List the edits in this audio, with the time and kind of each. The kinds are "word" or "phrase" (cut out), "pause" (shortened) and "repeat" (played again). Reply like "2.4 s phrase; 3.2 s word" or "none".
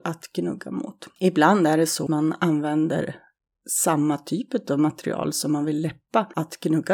2.1 s word